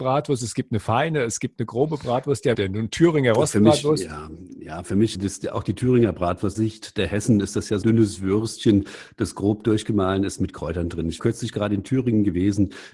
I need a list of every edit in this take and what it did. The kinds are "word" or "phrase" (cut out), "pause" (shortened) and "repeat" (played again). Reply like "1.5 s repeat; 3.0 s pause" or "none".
2.5 s word; 5.1 s word; 6.5 s word; 7.8 s word; 11.2 s word